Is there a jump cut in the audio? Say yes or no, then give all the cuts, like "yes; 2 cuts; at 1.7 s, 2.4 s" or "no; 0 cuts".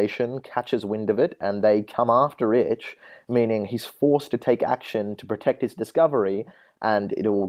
no; 0 cuts